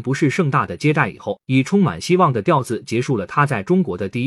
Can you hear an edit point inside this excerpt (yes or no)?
yes